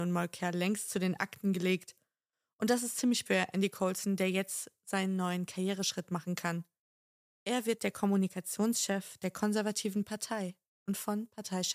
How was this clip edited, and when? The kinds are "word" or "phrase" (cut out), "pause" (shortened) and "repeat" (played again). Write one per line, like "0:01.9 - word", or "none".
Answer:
0:03.3 - word